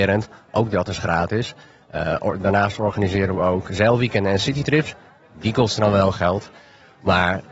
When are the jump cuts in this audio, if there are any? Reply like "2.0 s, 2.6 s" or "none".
none